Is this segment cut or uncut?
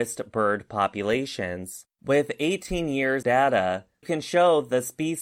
cut